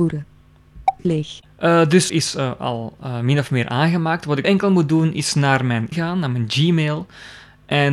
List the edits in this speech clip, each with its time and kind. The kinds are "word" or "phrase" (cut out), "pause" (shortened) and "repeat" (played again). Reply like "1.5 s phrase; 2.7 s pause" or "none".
2.1 s phrase; 4.4 s word; 5.9 s word